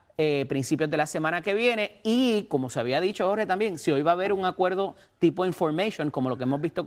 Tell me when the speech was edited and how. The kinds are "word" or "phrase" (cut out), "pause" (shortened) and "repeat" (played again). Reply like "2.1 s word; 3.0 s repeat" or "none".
none